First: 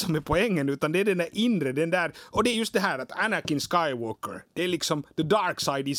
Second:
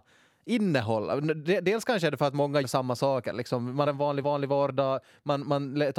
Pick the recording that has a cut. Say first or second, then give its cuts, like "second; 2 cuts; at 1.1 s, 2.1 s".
second; 3 cuts; at 2.6 s, 3.9 s, 4.2 s